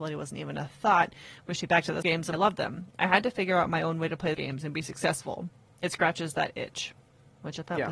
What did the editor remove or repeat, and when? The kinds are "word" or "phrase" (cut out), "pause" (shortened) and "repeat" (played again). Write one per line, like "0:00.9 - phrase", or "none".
0:01.6 - word
0:02.0 - word
0:02.3 - word
0:04.3 - word